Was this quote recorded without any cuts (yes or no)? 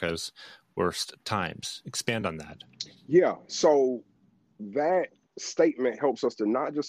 yes